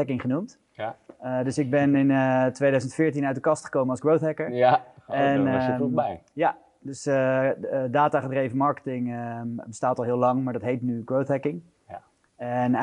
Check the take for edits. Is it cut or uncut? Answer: uncut